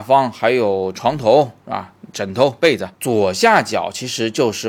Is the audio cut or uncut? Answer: cut